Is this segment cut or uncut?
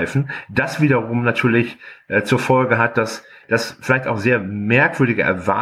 uncut